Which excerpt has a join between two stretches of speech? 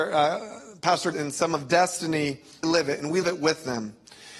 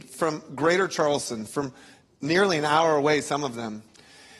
first; 3 cuts; at 1.1 s, 2.6 s, 3.2 s

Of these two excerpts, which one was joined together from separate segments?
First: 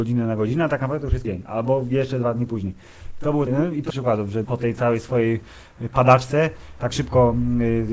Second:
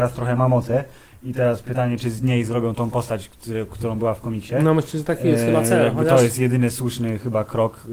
first; 5 cuts; at 1.2 s, 3.5 s, 3.9 s, 4.4 s, 6.9 s

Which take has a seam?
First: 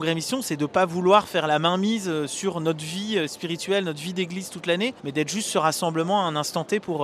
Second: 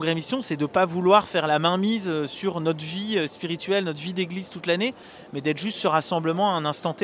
first; 1 cut; at 5.0 s

